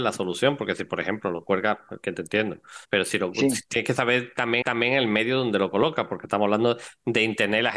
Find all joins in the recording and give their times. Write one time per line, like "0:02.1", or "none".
0:02.8
0:04.6